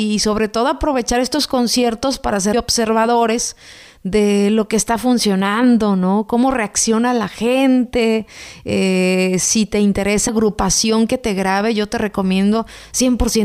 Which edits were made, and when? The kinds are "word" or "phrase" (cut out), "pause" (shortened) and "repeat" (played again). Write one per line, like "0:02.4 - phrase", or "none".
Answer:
0:02.5 - word
0:10.3 - word